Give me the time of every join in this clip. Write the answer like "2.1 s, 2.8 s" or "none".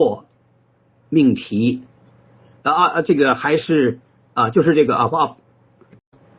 none

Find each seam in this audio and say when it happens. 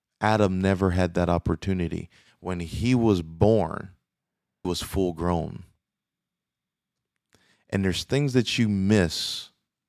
4.6 s

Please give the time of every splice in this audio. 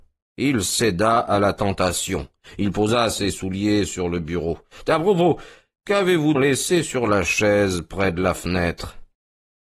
6.3 s

